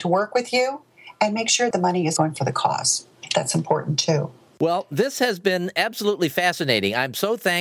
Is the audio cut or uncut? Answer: cut